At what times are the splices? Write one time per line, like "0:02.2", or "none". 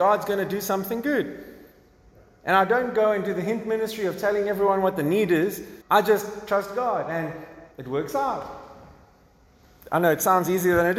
0:05.8
0:07.7